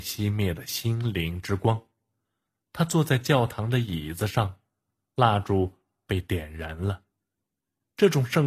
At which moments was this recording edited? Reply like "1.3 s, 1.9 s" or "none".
none